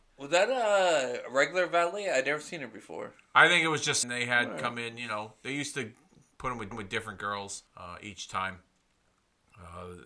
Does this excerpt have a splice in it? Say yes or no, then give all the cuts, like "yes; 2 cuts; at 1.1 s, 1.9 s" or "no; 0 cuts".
yes; 3 cuts; at 4.0 s, 6.7 s, 7.7 s